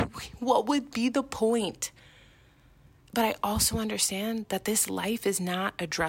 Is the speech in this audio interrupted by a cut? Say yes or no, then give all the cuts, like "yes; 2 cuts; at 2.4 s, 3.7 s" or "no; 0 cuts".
no; 0 cuts